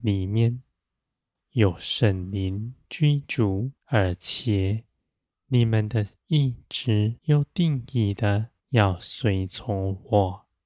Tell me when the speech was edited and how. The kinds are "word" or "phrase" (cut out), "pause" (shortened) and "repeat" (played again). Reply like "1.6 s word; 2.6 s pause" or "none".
3.8 s pause; 7.2 s pause; 8.6 s pause